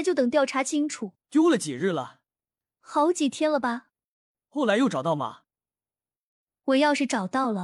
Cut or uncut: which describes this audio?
cut